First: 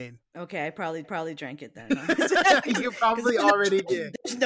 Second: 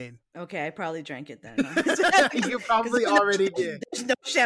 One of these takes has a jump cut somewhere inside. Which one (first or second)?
first